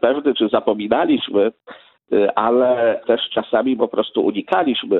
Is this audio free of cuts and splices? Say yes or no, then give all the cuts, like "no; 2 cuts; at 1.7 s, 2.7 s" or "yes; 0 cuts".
no; 2 cuts; at 3.0 s, 3.8 s